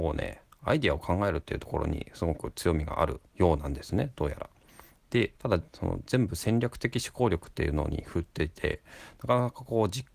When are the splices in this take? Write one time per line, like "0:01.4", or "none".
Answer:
0:05.3

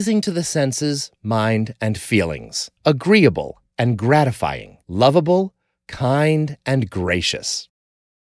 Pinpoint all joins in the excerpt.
0:02.8
0:04.8

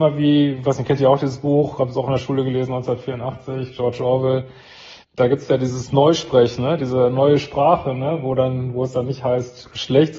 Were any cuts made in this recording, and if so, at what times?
0:05.0

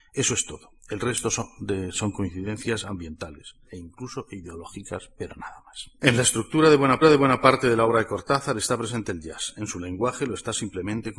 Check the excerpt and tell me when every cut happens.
0:03.7
0:06.0
0:07.0

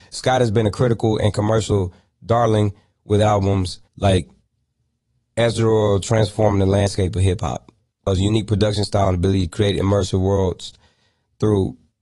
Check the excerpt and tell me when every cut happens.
0:03.9

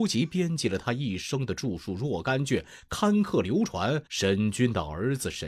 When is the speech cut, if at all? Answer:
0:04.1

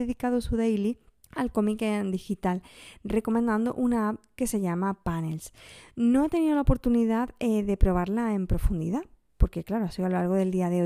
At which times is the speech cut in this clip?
0:01.2

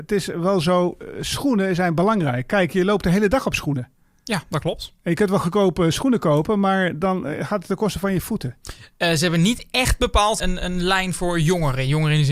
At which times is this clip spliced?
0:10.4

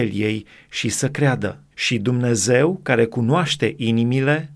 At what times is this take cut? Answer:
0:01.7

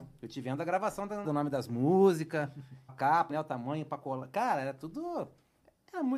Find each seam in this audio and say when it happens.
0:01.2
0:02.9
0:03.3

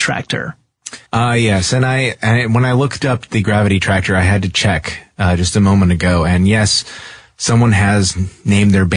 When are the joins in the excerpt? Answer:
0:01.0

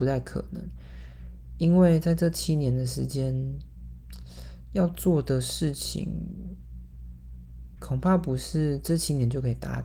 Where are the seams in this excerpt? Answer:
0:07.8

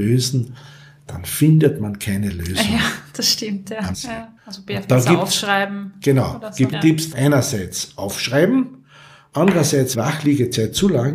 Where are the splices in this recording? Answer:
0:03.9
0:04.4
0:06.7
0:07.1
0:09.9

